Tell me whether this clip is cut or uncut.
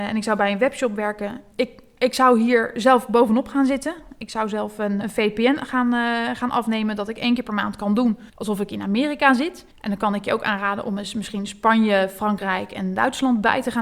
cut